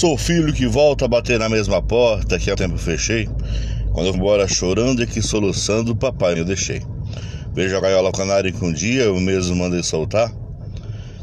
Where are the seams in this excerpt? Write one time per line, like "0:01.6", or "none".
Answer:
0:02.6
0:04.1
0:06.4
0:08.1